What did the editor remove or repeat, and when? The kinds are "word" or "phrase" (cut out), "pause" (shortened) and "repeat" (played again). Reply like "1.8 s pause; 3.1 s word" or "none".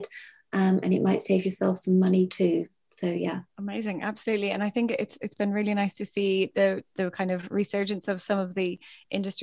3.5 s pause

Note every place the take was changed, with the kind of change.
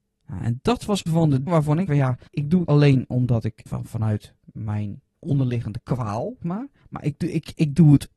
1.1 s phrase; 1.5 s word; 1.9 s word; 2.3 s pause; 2.7 s word; 3.7 s word; 5.1 s word; 6.4 s word; 6.8 s pause

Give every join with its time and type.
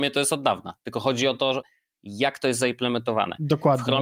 none

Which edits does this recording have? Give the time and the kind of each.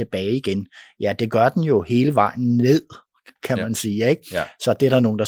3.4 s pause

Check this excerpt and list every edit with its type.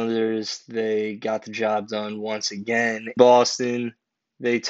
3.2 s word

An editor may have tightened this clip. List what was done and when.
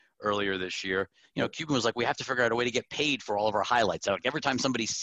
1.2 s pause

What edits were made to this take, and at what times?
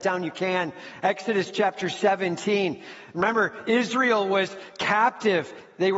none

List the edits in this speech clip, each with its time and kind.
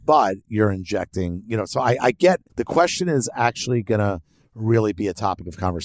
2.5 s pause

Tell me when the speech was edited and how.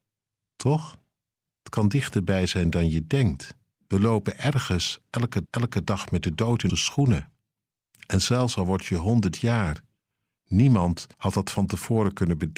3.7 s pause; 5.5 s repeat; 6.7 s word; 7.6 s pause; 11.1 s pause

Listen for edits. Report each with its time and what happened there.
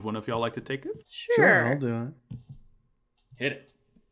1.0 s pause; 2.2 s pause

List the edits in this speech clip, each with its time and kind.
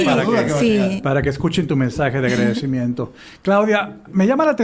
none

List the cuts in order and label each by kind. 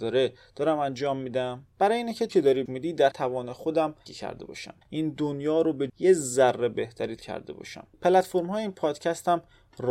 1.7 s pause; 2.3 s word; 2.7 s phrase; 3.1 s word; 4.1 s word; 4.8 s pause; 5.9 s word; 7.2 s word; 7.9 s pause

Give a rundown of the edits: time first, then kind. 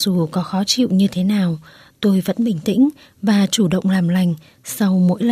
none

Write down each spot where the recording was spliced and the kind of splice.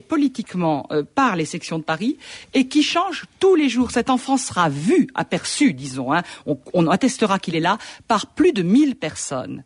none

